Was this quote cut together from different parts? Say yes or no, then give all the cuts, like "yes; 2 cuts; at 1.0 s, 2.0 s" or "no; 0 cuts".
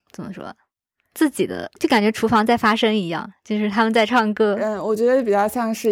yes; 1 cut; at 1.8 s